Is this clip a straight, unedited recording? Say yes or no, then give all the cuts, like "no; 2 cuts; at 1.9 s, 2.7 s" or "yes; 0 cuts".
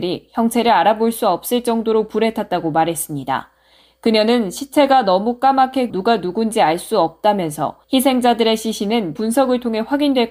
no; 3 cuts; at 5.9 s, 7.8 s, 9.2 s